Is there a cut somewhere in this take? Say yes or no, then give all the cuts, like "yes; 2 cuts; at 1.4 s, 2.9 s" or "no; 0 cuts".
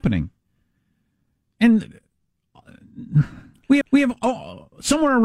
yes; 1 cut; at 3.8 s